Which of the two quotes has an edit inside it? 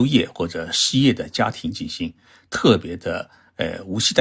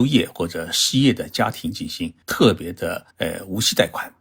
second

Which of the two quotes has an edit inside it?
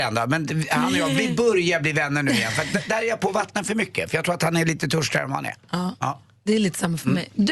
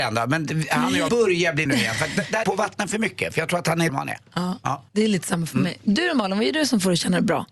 second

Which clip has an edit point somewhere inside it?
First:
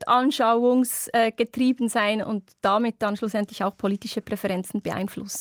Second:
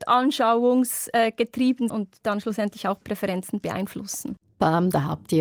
second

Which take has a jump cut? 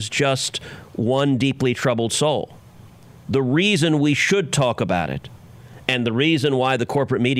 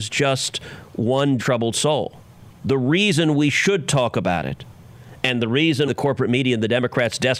second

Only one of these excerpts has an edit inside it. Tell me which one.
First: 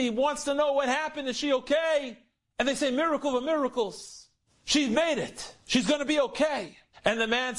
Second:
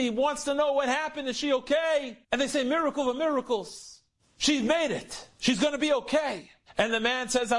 second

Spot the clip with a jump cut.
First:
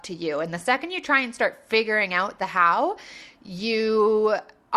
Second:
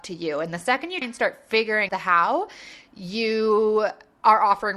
second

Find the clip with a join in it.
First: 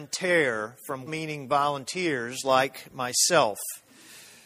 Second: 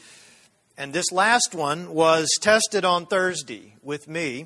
first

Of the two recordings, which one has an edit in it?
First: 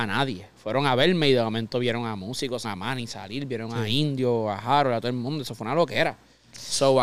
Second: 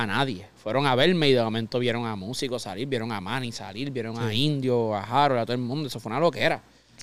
first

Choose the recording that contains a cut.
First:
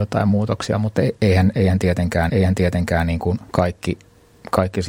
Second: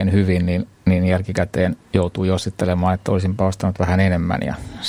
first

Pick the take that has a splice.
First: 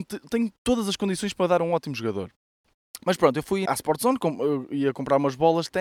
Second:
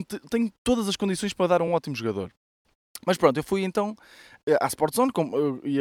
first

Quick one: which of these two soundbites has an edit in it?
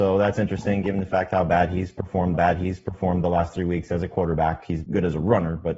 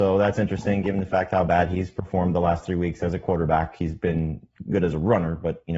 first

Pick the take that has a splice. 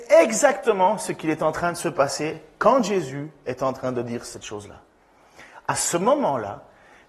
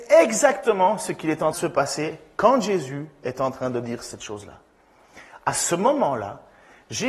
second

